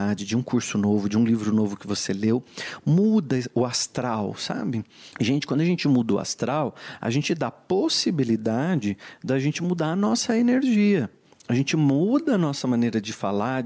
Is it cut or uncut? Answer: cut